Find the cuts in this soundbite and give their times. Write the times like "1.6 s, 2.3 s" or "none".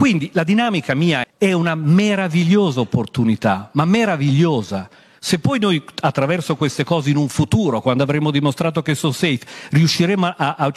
1.2 s